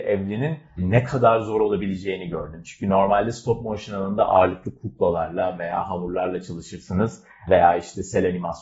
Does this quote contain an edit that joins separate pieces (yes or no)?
no